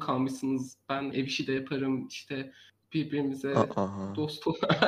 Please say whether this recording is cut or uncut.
cut